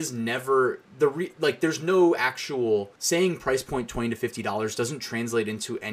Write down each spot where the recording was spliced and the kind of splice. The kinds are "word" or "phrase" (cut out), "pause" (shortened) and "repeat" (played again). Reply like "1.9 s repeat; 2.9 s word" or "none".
3.0 s pause

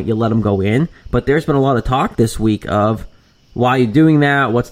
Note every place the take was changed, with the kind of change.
none

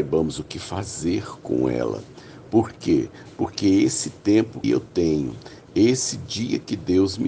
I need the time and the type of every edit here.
4.6 s word

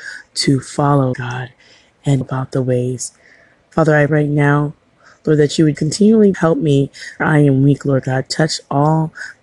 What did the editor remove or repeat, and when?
1.1 s word; 2.2 s word; 4.1 s word; 5.7 s word; 6.3 s word; 7.2 s word

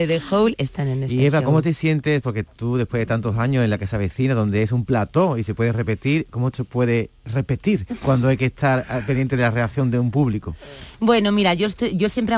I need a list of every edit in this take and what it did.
6.5 s phrase

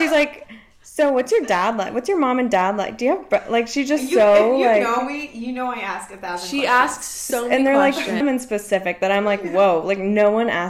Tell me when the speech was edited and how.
8.2 s word

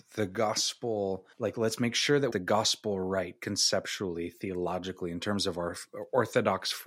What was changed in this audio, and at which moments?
1.3 s pause; 2.3 s phrase

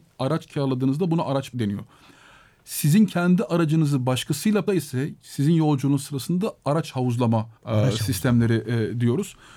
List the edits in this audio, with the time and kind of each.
1.5 s word; 4.7 s word; 7.6 s pause

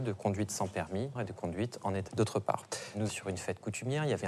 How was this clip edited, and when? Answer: 1.2 s phrase; 2.1 s word; 3.1 s word

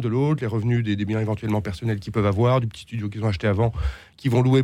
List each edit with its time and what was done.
none

